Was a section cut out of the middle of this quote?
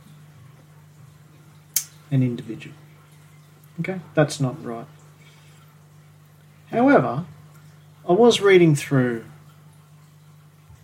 no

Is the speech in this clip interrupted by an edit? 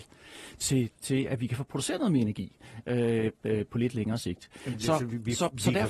yes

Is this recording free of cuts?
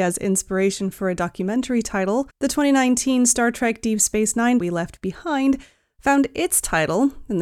no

